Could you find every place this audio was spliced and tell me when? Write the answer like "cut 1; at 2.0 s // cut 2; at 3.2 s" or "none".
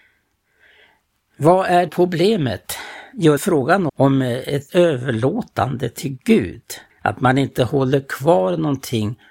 cut 1; at 1.9 s // cut 2; at 3.4 s // cut 3; at 3.9 s // cut 4; at 4.7 s // cut 5; at 6.9 s